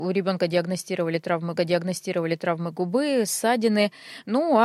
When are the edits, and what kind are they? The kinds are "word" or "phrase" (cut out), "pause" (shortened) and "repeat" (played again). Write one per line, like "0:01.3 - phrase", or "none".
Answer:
0:01.6 - repeat